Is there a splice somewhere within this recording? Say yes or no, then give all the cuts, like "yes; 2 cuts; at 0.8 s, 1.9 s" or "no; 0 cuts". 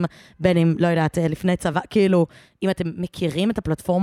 no; 0 cuts